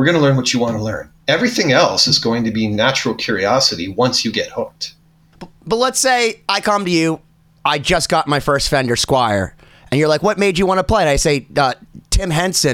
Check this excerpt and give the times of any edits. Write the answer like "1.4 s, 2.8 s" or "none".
none